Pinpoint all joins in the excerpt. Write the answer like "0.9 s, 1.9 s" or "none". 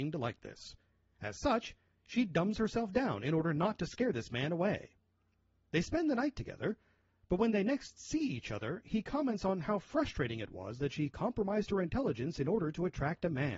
none